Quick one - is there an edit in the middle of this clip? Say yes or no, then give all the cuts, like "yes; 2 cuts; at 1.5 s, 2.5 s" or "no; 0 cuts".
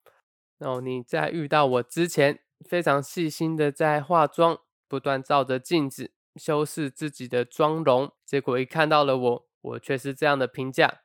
yes; 2 cuts; at 8.2 s, 9.5 s